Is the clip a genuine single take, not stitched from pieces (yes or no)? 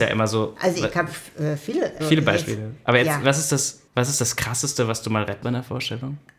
no